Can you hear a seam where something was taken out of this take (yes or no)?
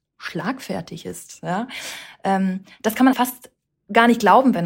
yes